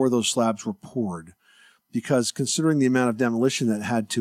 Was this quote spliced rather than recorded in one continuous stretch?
no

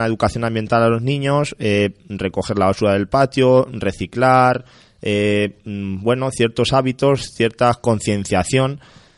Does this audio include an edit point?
no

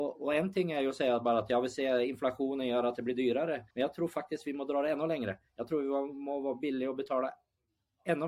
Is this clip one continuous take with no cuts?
no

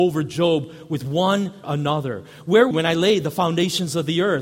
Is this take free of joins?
no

